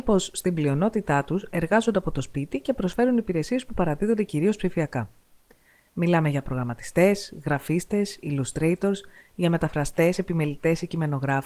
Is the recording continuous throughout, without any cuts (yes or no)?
yes